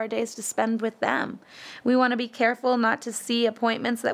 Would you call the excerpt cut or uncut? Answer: uncut